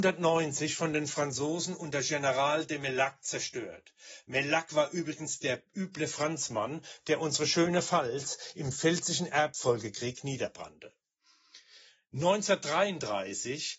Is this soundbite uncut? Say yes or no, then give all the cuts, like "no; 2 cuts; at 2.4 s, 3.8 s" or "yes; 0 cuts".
yes; 0 cuts